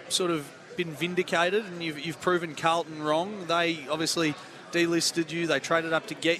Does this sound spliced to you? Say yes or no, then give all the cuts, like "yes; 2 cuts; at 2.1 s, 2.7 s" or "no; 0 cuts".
no; 0 cuts